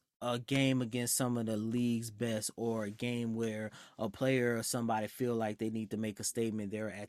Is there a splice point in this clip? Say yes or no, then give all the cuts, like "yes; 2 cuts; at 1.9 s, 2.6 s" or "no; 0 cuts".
no; 0 cuts